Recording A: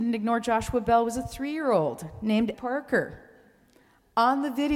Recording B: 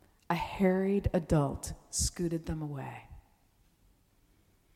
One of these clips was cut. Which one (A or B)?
A